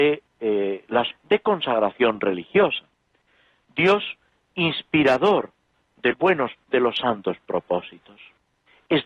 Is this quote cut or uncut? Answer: cut